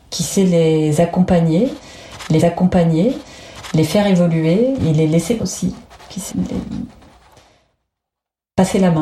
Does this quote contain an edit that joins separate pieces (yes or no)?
yes